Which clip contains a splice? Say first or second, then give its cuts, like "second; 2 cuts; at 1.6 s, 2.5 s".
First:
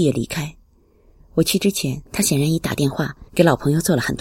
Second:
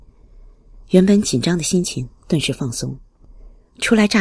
first; 2 cuts; at 2.1 s, 3.3 s